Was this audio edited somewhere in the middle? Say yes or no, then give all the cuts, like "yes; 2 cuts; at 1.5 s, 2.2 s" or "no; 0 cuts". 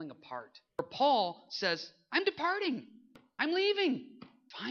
no; 0 cuts